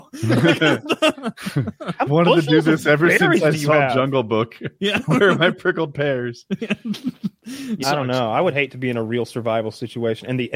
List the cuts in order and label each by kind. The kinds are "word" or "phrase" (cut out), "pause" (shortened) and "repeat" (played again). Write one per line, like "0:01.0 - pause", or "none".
0:02.1 - word
0:07.8 - word